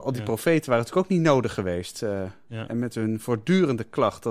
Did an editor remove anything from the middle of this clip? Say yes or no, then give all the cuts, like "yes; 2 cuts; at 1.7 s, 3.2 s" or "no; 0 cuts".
no; 0 cuts